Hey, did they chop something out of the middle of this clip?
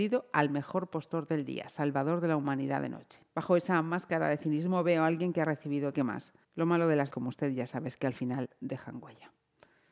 yes; 4 cuts; at 3.3 s, 5.9 s, 6.4 s, 7.1 s

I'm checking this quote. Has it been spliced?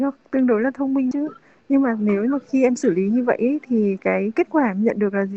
yes; 1 cut; at 1.1 s

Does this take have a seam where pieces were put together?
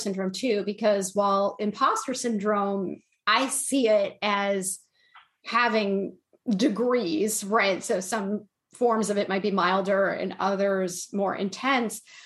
no; 0 cuts

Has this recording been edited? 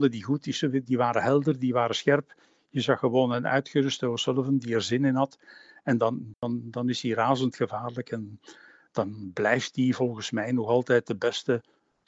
no; 0 cuts

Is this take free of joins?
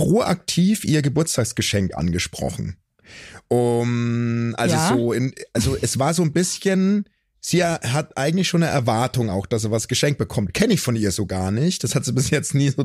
yes; 0 cuts

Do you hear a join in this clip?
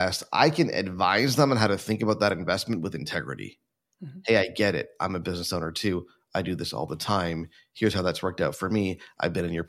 no; 0 cuts

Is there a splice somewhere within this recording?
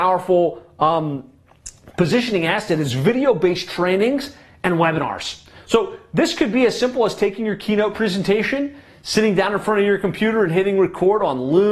no; 0 cuts

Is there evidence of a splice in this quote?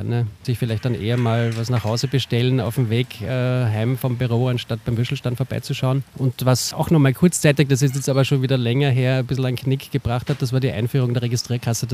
no; 0 cuts

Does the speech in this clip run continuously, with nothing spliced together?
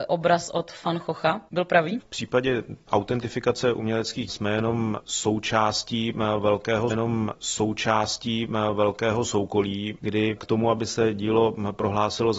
no; 2 cuts; at 4.3 s, 6.9 s

